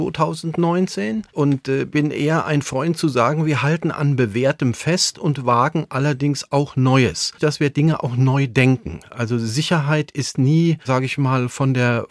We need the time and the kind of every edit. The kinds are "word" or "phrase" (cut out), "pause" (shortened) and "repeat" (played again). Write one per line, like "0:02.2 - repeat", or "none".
0:01.3 - pause
0:01.9 - word
0:07.4 - pause
0:10.8 - word